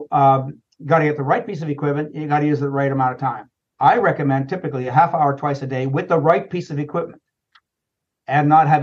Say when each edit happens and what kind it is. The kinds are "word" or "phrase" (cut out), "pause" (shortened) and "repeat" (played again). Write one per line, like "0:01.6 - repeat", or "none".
0:03.6 - pause